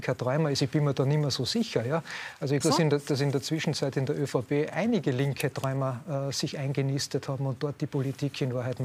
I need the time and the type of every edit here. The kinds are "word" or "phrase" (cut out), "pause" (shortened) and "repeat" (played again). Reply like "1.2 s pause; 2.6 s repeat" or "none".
2.6 s word